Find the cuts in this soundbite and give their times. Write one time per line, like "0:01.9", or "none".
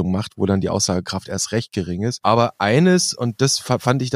none